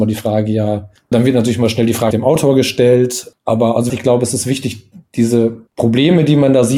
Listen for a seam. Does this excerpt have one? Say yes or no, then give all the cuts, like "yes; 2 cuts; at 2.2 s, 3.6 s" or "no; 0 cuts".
yes; 5 cuts; at 1.1 s, 2.1 s, 3.4 s, 3.9 s, 5.7 s